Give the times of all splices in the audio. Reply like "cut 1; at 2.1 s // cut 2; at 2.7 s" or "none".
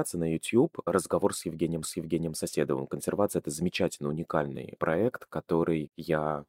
cut 1; at 1.8 s

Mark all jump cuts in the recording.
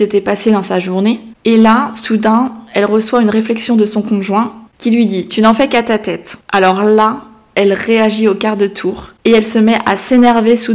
cut 1; at 4.7 s // cut 2; at 6.4 s

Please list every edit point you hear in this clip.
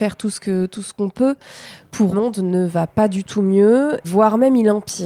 cut 1; at 2.1 s // cut 2; at 4.0 s

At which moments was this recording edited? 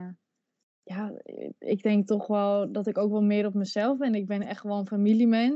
none

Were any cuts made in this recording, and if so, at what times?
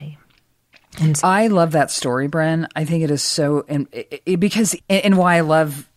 cut 1; at 1.2 s // cut 2; at 4.8 s

